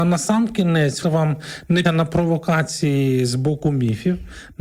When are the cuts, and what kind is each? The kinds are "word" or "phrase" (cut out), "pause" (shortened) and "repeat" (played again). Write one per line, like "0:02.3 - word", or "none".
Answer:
0:01.0 - phrase
0:01.8 - word

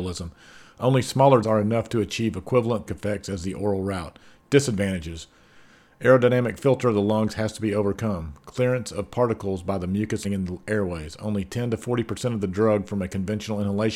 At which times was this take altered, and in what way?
0:01.4 - word
0:02.9 - word
0:10.2 - word

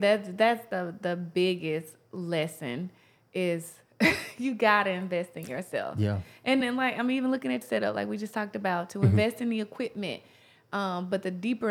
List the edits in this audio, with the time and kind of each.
0:06.6 - word
0:07.6 - word

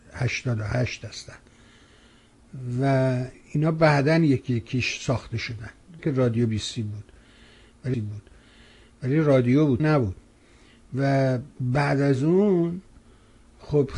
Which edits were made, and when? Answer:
0:03.3 - pause
0:06.0 - word
0:06.5 - word
0:07.9 - repeat
0:09.8 - word
0:11.5 - pause

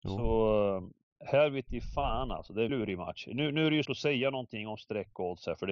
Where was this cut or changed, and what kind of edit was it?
0:01.1 - pause
0:02.7 - word
0:03.9 - word

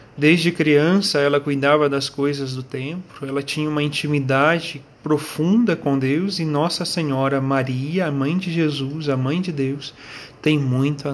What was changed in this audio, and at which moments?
0:04.9 - pause

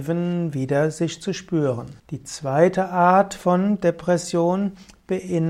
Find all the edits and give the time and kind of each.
0:02.0 - pause

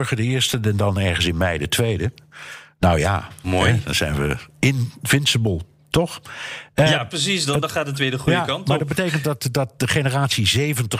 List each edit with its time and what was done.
none

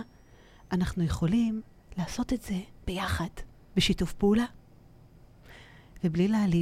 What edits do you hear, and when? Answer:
none

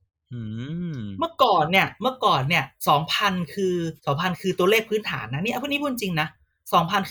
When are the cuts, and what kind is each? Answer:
0:04.0 - pause

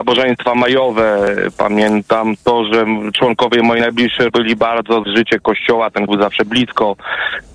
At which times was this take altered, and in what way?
0:04.3 - word
0:05.0 - phrase
0:06.1 - word

